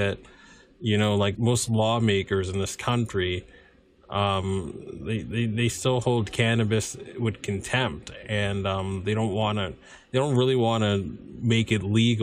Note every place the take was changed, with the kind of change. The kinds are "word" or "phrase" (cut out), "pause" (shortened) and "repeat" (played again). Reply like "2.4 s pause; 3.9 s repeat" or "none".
1.3 s word